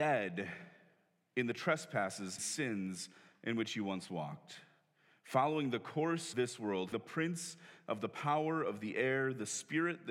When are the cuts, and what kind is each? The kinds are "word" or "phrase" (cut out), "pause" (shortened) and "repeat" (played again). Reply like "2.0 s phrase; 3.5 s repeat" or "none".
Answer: 2.4 s word; 6.3 s word; 6.9 s word